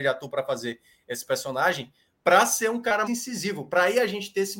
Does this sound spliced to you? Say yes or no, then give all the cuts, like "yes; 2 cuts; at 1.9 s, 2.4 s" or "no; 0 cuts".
yes; 1 cut; at 3.1 s